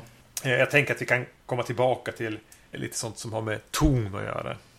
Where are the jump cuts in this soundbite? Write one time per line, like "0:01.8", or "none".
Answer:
0:02.7